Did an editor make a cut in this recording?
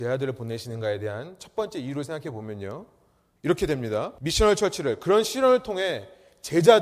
no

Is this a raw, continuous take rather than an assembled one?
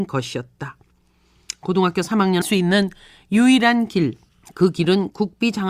no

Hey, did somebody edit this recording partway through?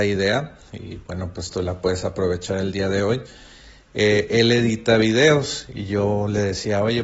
no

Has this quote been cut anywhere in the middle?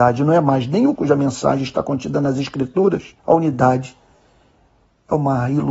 yes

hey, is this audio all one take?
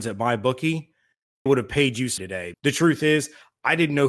no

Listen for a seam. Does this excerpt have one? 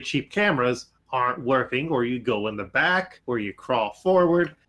no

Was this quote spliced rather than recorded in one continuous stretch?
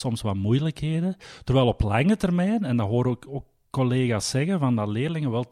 no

